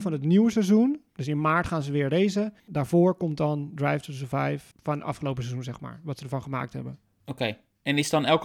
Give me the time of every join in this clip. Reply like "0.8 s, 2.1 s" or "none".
1.1 s, 2.6 s, 4.7 s